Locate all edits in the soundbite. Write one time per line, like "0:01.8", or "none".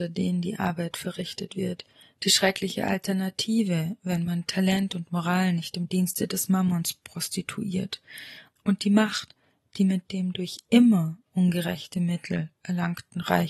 none